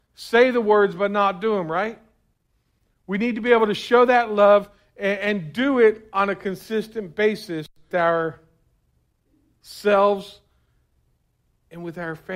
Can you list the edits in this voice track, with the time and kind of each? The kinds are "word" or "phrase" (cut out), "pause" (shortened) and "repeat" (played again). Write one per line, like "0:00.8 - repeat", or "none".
0:07.9 - word